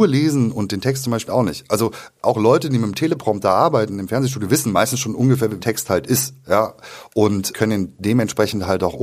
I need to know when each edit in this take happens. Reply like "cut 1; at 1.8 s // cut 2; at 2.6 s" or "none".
cut 1; at 1.3 s // cut 2; at 5.6 s // cut 3; at 7.5 s